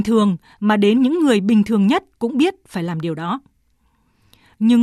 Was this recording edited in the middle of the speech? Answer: no; 0 cuts

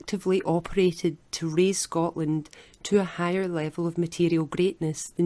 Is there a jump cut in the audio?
no; 0 cuts

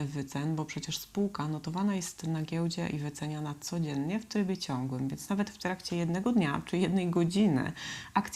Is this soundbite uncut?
yes; 0 cuts

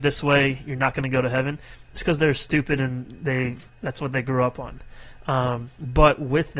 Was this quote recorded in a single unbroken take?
yes; 0 cuts

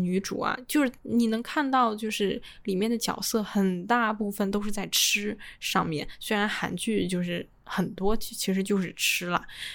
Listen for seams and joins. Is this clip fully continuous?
no; 1 cut; at 1.0 s

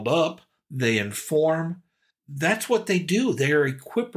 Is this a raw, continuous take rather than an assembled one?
yes; 0 cuts

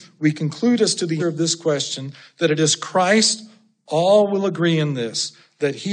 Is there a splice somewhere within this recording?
yes; 1 cut; at 1.2 s

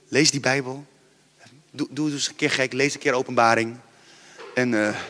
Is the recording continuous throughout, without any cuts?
no; 1 cut; at 1.9 s

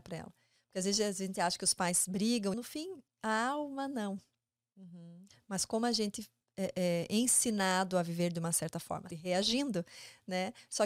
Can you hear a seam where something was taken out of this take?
yes; 2 cuts; at 2.5 s, 9.1 s

